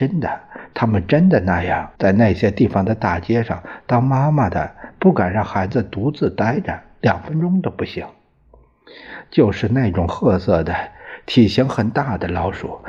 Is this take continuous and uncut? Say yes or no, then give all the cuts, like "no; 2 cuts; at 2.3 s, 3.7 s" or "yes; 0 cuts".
no; 1 cut; at 2.0 s